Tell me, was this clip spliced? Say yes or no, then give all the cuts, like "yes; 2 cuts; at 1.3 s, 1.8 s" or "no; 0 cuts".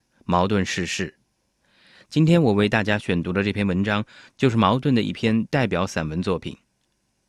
no; 0 cuts